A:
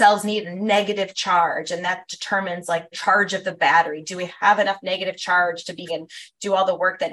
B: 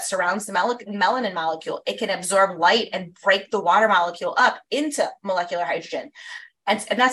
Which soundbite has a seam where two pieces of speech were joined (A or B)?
A